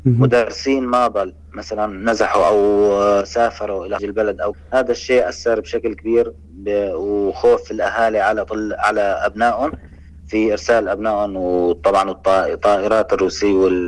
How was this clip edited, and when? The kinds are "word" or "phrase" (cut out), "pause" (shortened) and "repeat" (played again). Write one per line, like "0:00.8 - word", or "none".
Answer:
0:04.0 - word
0:04.5 - word